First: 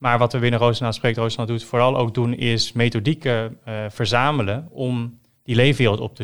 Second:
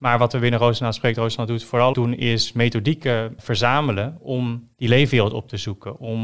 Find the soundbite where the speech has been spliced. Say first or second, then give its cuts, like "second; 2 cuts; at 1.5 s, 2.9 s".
second; 3 cuts; at 1.9 s, 3.4 s, 4.7 s